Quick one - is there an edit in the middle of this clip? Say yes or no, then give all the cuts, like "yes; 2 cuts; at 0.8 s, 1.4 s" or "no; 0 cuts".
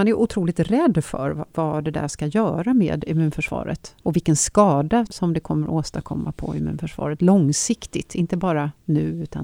yes; 2 cuts; at 4.0 s, 5.1 s